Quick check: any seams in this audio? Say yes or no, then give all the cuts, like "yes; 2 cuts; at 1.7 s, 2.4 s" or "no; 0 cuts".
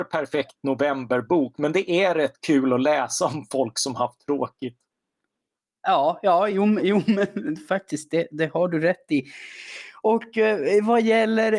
no; 0 cuts